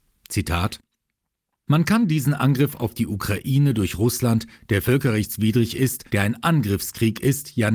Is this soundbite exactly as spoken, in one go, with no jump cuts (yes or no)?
no